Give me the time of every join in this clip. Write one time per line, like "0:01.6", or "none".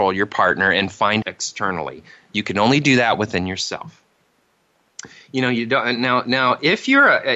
0:01.2